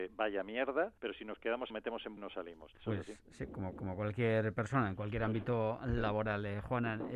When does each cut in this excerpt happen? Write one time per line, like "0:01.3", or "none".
0:01.0
0:01.7
0:02.2
0:03.7